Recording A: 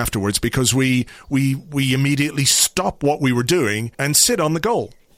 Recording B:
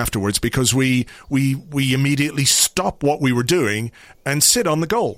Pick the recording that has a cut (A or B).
A